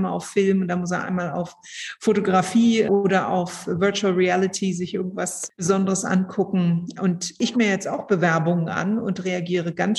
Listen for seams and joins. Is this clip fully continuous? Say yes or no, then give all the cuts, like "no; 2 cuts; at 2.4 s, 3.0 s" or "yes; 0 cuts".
no; 1 cut; at 7.5 s